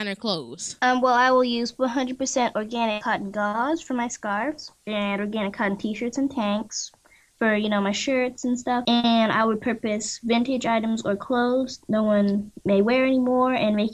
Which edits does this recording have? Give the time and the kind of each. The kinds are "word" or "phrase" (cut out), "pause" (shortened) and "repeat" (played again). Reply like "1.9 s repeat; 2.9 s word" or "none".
none